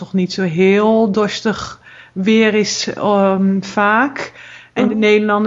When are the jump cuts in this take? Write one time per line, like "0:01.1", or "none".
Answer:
none

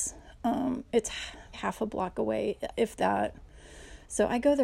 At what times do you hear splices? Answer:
0:01.5

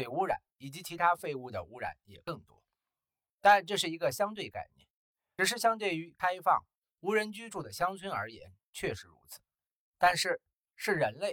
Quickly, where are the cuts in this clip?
none

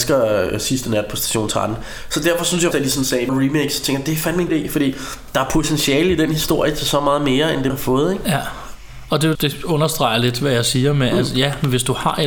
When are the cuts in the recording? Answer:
0:02.7
0:03.3
0:04.5
0:07.7
0:09.3

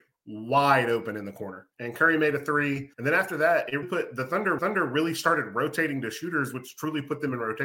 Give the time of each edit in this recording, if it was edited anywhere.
0:01.7
0:02.9
0:03.8
0:04.6

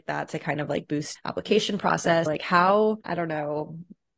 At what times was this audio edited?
0:01.2
0:02.3
0:03.0

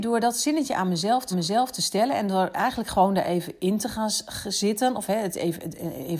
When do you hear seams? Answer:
0:01.3

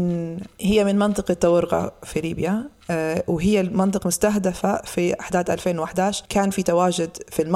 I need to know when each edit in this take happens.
0:04.0

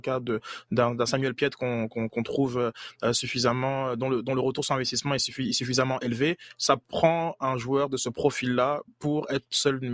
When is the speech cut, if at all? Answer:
none

